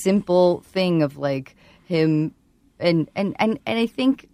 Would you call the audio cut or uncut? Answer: uncut